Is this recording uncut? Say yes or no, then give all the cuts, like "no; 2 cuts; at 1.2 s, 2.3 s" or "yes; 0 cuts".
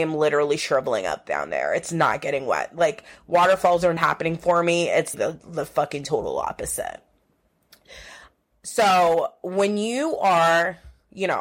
no; 2 cuts; at 4.0 s, 5.1 s